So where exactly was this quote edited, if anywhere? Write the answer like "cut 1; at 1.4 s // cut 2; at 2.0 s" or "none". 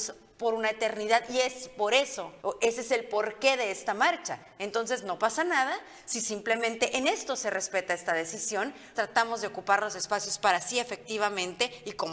cut 1; at 2.4 s // cut 2; at 8.9 s